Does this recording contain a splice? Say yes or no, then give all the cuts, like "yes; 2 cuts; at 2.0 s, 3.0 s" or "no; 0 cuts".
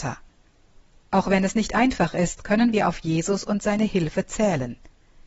no; 0 cuts